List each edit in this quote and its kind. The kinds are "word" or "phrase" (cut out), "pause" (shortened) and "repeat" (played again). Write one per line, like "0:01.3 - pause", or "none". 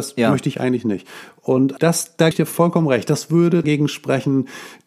0:01.8 - word
0:02.3 - word
0:03.6 - word